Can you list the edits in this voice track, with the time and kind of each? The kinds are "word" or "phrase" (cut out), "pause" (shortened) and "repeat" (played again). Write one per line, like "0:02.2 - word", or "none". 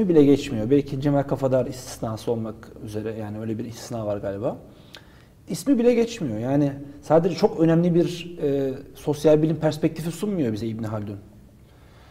none